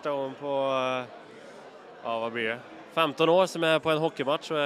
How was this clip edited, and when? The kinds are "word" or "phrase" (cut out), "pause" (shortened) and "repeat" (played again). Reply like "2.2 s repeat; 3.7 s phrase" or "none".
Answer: none